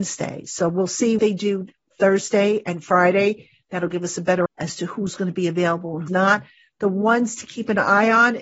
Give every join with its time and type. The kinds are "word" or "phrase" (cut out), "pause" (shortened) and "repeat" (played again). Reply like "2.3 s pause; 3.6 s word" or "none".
1.2 s word; 4.5 s word; 6.1 s word